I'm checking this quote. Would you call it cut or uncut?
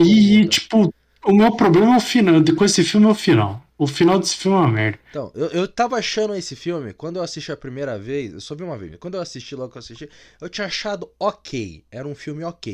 uncut